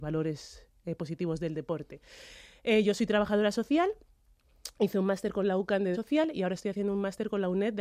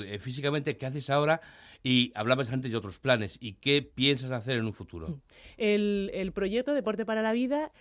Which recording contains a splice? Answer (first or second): first